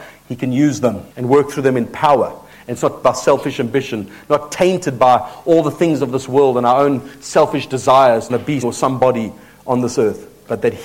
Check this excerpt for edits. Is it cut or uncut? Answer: cut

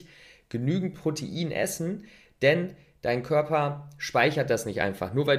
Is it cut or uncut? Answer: uncut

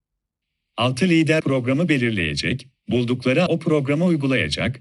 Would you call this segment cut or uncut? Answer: cut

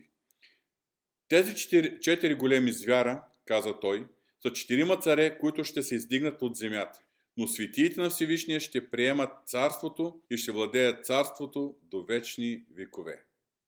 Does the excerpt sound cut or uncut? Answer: cut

